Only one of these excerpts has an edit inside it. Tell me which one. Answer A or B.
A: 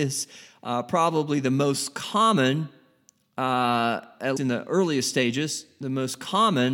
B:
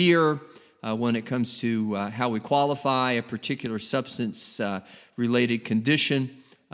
A